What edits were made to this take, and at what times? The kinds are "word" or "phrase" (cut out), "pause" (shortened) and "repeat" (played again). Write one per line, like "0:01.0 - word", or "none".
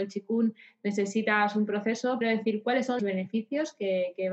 0:02.2 - phrase
0:03.0 - word